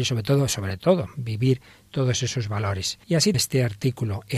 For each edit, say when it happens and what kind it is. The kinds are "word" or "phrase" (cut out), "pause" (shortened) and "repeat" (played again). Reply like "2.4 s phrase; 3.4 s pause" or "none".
3.0 s pause; 3.3 s word